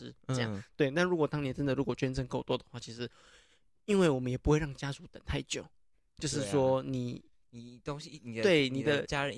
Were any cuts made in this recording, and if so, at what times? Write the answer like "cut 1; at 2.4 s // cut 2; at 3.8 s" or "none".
none